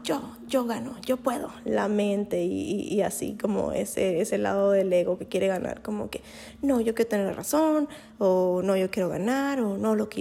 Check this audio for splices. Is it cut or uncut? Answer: uncut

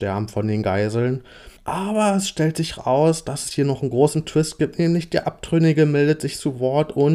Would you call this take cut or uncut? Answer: cut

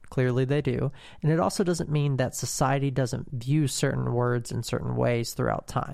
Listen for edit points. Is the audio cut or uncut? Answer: uncut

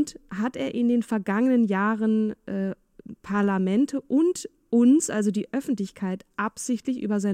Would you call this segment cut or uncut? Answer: uncut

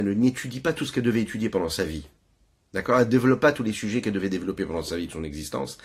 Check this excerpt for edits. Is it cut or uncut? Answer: uncut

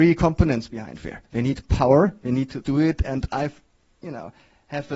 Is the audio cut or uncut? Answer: cut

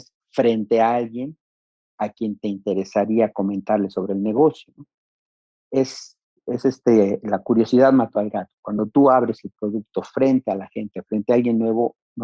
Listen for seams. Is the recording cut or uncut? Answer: uncut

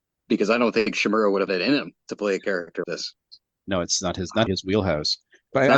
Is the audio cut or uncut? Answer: cut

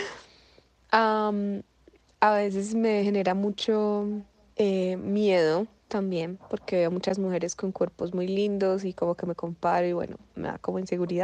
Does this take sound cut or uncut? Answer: uncut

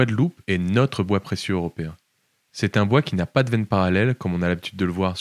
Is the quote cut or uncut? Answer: uncut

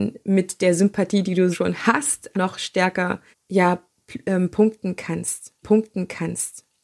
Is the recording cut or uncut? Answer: cut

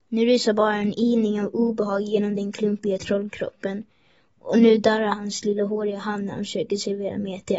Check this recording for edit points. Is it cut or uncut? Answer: uncut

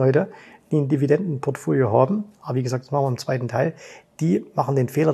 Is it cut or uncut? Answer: uncut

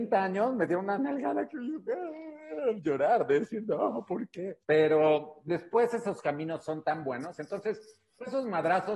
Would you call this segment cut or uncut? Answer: cut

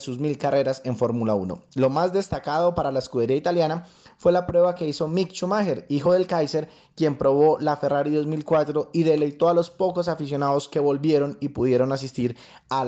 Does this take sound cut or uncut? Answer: uncut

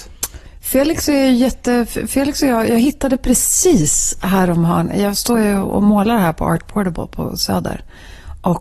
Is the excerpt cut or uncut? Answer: uncut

